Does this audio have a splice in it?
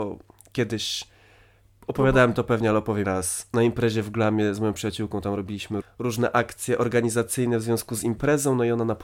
yes; 2 cuts; at 3.0 s, 5.8 s

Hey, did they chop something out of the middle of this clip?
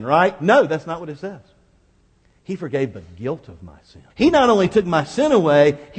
yes; 1 cut; at 4.1 s

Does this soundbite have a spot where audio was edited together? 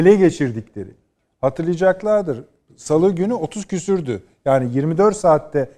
no; 0 cuts

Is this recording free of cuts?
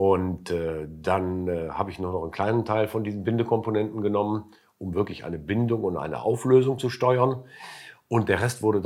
yes; 0 cuts

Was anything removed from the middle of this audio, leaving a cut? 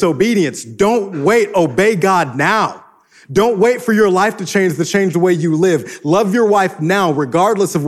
no; 0 cuts

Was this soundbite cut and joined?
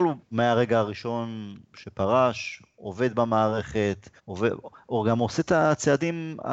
yes; 1 cut; at 4.2 s

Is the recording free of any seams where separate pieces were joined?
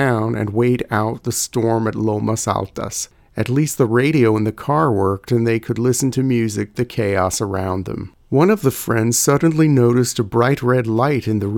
no; 1 cut; at 6.7 s

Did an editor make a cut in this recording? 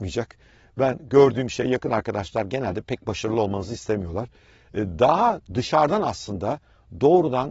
no; 0 cuts

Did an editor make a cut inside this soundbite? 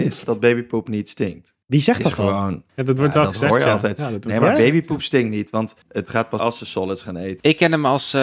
yes; 4 cuts; at 1.6 s, 2.7 s, 5.8 s, 6.4 s

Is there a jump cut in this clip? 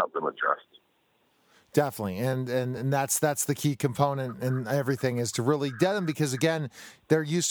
no; 0 cuts

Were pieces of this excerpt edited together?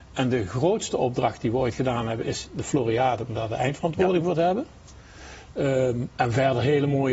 no; 0 cuts

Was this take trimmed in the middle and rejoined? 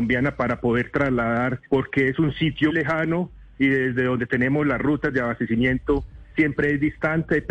yes; 2 cuts; at 1.7 s, 2.7 s

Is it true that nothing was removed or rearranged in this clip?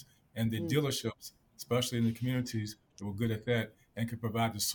yes; 0 cuts

